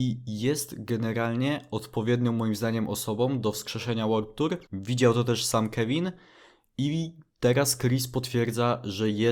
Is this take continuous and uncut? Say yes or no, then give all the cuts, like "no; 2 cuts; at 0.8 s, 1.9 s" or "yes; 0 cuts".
no; 1 cut; at 4.7 s